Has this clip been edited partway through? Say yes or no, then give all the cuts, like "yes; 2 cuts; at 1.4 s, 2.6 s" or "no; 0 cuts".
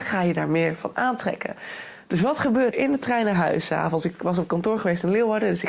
yes; 1 cut; at 2.7 s